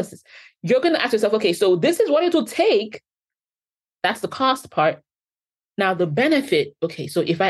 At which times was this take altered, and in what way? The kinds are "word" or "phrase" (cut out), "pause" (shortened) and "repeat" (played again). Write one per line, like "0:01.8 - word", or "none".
none